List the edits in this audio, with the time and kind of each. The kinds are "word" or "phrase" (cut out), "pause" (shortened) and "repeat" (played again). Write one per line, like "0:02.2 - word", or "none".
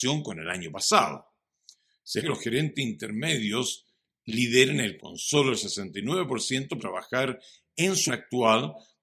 0:02.2 - word
0:05.0 - word
0:06.8 - word
0:08.1 - word